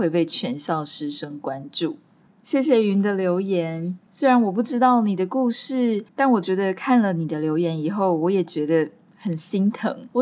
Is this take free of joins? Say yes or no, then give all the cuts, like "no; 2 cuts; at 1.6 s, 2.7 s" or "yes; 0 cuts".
yes; 0 cuts